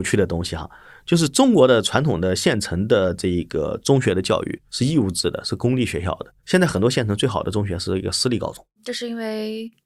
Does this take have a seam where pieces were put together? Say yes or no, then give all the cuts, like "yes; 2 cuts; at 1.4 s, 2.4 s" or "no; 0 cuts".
yes; 2 cuts; at 4.7 s, 6.4 s